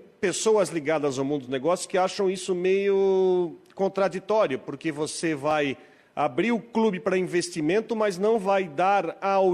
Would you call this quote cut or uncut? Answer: uncut